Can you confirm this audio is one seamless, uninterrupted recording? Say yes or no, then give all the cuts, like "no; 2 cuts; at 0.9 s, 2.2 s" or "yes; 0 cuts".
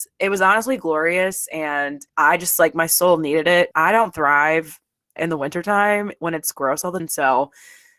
no; 5 cuts; at 2.1 s, 3.7 s, 5.2 s, 6.5 s, 7.0 s